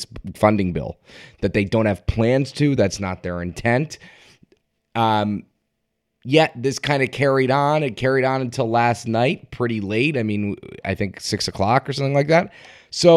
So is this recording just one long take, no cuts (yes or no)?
yes